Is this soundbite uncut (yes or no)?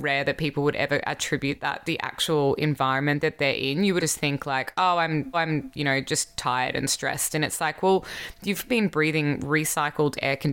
no